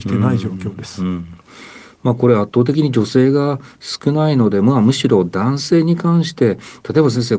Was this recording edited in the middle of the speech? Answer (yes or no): no